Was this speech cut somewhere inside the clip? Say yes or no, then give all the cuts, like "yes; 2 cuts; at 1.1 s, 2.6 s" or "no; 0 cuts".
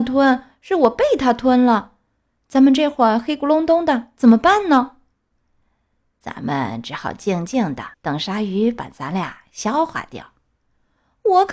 yes; 1 cut; at 7.9 s